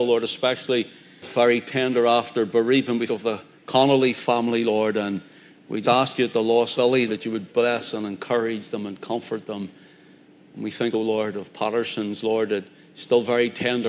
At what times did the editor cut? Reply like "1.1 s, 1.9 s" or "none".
1.2 s, 3.1 s, 5.8 s, 6.7 s, 7.1 s, 10.9 s